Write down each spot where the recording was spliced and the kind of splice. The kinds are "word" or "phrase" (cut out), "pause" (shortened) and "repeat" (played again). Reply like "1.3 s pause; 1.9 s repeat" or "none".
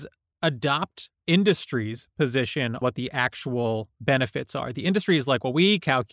1.2 s word; 2.8 s word